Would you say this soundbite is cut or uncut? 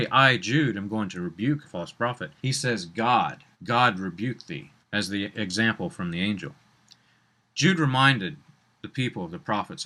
cut